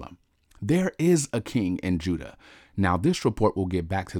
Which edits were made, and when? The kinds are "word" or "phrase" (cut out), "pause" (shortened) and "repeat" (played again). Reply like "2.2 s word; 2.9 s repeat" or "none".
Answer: none